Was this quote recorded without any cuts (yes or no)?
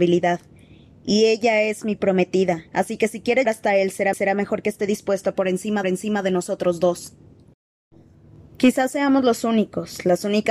no